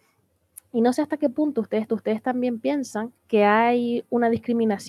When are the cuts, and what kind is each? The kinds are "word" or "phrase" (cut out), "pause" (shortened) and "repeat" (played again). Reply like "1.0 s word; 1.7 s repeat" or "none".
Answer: 1.9 s repeat; 3.2 s pause